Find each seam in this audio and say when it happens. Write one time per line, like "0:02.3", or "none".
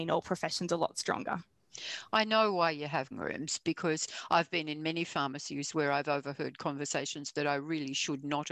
0:03.1

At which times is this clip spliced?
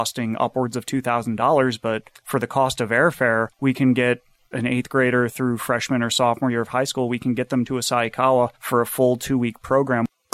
0:02.1
0:03.5
0:04.5
0:08.5

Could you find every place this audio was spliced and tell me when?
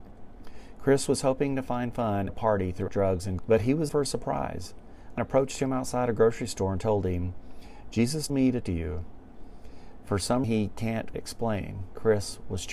0:02.3
0:02.9
0:03.4
0:03.9
0:05.2
0:08.3
0:08.6
0:10.4
0:11.1

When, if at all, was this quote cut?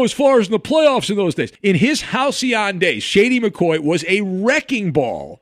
0:01.5

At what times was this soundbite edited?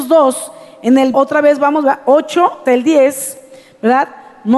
0:01.1
0:02.7

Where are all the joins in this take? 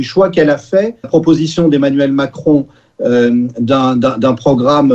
0:01.0

